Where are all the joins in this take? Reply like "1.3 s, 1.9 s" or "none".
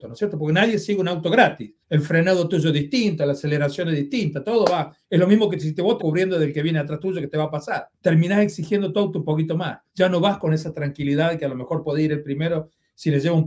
1.8 s, 6.0 s, 8.0 s, 9.9 s